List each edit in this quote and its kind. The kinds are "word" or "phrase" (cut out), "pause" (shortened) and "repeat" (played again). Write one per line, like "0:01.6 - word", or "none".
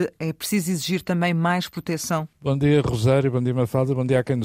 0:02.3 - pause